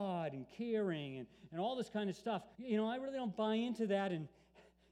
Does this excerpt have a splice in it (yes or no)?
yes